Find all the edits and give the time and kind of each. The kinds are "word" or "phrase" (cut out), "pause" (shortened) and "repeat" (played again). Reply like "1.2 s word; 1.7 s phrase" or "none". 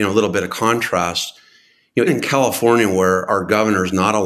2.1 s word; 3.3 s word